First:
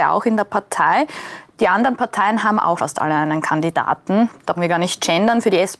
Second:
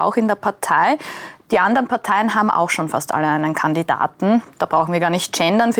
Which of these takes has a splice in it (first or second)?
first